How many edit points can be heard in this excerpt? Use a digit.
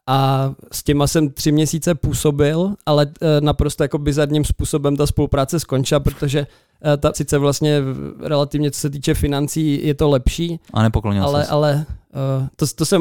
1